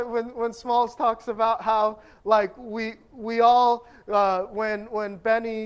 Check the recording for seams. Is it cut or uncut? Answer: uncut